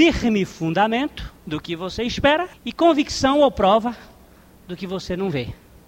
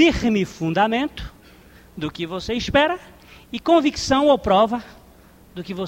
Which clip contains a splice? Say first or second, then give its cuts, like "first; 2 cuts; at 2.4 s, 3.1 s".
first; 2 cuts; at 1.4 s, 2.5 s